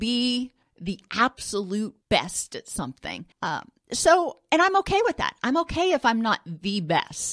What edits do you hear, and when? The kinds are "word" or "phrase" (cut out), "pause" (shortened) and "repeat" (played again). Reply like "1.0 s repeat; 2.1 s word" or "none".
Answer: 2.0 s pause; 3.3 s pause